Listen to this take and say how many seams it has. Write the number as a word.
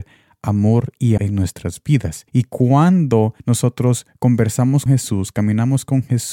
four